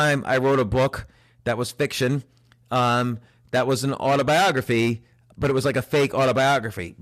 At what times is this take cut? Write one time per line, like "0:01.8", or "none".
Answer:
none

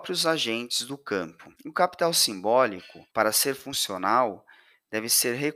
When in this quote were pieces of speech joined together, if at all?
0:01.5
0:03.1

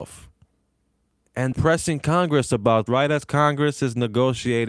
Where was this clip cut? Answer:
0:01.5
0:02.9

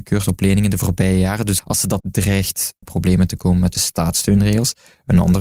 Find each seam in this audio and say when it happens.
0:01.6
0:02.0
0:02.8
0:03.7

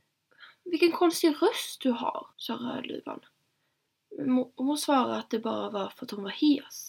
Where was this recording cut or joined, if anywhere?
0:02.3

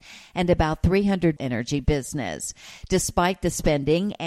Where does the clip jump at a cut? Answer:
0:01.4

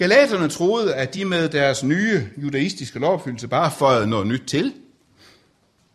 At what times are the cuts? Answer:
none

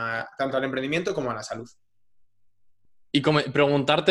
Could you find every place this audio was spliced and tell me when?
none

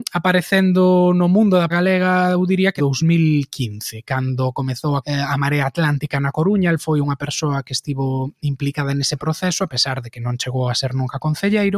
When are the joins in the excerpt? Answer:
0:01.7
0:02.8
0:05.0

